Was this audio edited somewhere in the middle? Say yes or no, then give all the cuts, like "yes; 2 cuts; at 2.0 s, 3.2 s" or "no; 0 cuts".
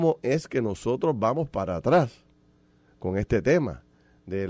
no; 0 cuts